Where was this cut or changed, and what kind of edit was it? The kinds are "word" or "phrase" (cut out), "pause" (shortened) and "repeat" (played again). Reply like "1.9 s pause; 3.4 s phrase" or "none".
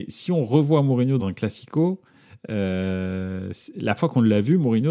1.2 s word; 4.0 s word